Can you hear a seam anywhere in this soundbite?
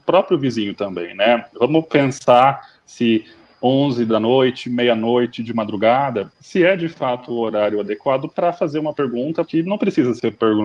no; 0 cuts

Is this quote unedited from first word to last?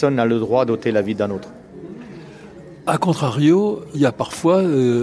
no; 1 cut; at 3.9 s

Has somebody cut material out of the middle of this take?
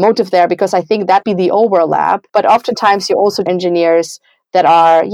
yes; 3 cuts; at 1.2 s, 2.3 s, 3.5 s

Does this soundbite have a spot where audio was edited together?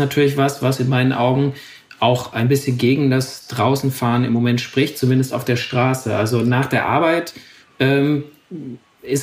no; 0 cuts

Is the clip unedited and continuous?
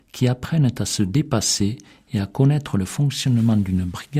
yes; 0 cuts

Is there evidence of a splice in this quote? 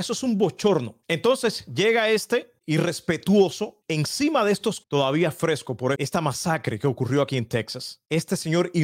yes; 3 cuts; at 2.6 s, 4.8 s, 5.9 s

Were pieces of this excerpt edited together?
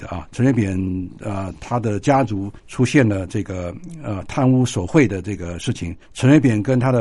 yes; 2 cuts; at 2.6 s, 6.0 s

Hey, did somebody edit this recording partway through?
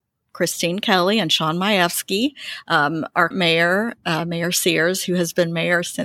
yes; 1 cut; at 3.3 s

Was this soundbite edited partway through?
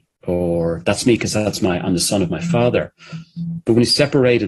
no; 0 cuts

